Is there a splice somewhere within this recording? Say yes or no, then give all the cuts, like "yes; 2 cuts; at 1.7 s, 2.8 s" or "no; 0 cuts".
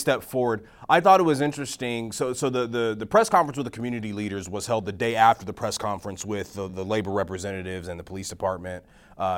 yes; 1 cut; at 6.7 s